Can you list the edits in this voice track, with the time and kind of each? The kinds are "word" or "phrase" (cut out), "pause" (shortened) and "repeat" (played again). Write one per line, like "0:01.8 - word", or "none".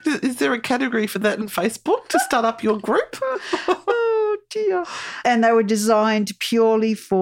none